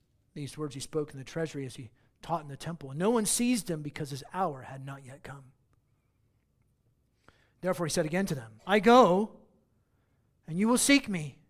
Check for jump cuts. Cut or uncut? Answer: cut